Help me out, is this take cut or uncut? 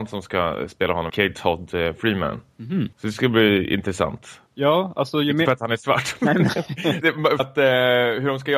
cut